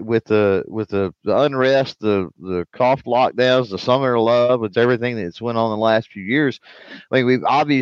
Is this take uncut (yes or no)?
no